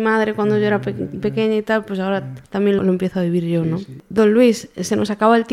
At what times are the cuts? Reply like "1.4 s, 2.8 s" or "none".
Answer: 2.8 s